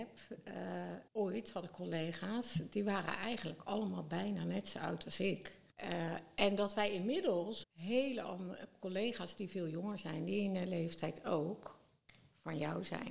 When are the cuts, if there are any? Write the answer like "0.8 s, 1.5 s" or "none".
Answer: 1.1 s, 5.7 s, 7.6 s